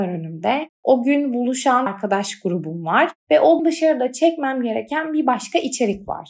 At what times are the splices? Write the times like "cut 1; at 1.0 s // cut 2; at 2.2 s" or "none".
cut 1; at 1.9 s // cut 2; at 3.6 s